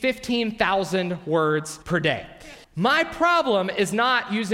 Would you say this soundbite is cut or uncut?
cut